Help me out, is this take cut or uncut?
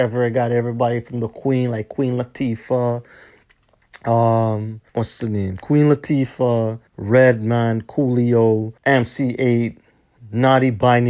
cut